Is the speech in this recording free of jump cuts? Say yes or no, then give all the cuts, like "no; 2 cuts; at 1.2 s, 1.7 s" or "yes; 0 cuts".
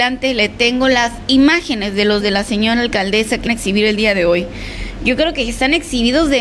no; 2 cuts; at 2.2 s, 3.5 s